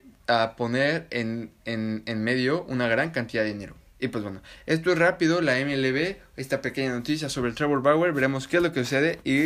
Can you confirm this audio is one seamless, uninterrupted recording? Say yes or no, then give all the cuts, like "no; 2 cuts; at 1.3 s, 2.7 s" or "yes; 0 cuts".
yes; 0 cuts